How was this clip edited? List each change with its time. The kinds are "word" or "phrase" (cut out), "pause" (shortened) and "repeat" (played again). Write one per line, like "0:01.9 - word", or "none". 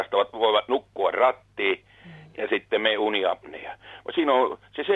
none